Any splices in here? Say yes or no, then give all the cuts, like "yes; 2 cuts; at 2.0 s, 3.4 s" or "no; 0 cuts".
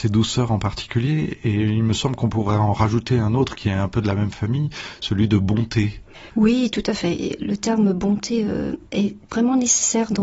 yes; 1 cut; at 8.9 s